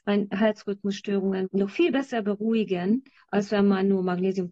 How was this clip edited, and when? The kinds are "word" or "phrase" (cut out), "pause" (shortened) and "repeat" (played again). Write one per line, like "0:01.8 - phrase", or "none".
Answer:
none